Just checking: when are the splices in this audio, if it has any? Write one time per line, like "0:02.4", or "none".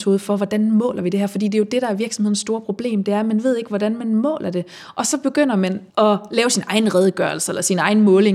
0:05.9